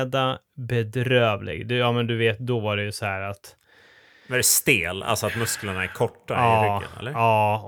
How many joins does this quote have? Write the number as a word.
zero